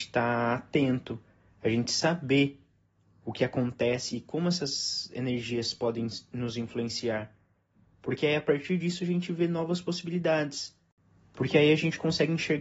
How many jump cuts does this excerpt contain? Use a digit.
0